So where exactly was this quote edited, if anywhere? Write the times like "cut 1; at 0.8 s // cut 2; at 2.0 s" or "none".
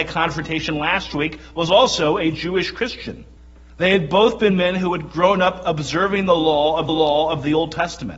cut 1; at 3.4 s // cut 2; at 6.9 s

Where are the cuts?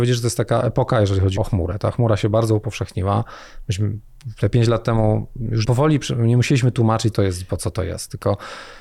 cut 1; at 1.4 s // cut 2; at 5.6 s // cut 3; at 7.1 s

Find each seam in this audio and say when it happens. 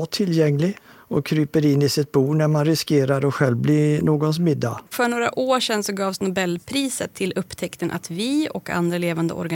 cut 1; at 4.9 s

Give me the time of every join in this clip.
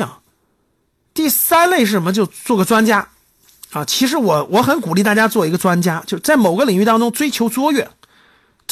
none

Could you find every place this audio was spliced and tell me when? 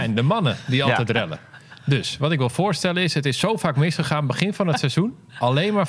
none

